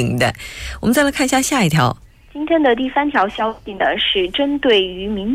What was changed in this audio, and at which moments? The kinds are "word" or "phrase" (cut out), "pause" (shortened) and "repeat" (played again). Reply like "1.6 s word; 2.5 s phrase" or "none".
2.0 s pause